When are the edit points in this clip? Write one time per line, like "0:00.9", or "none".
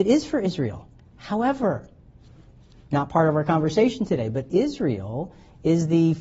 none